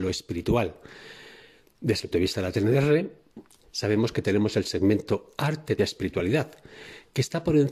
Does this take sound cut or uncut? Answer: cut